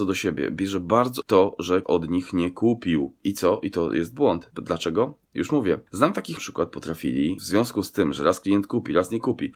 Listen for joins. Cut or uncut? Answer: cut